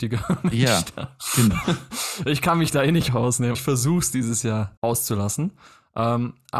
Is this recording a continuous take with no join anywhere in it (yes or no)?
no